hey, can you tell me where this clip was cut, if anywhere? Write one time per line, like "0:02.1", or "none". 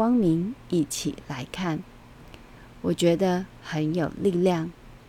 none